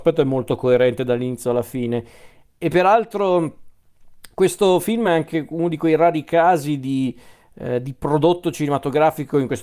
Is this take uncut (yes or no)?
yes